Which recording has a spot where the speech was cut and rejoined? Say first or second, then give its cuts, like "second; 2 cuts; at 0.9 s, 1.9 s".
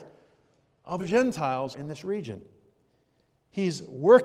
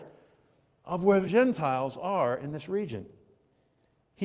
first; 2 cuts; at 1.0 s, 1.7 s